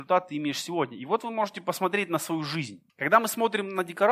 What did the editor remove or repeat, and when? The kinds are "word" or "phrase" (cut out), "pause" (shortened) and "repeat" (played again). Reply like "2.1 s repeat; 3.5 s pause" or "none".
2.9 s pause